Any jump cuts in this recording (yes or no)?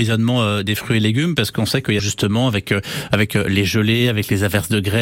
yes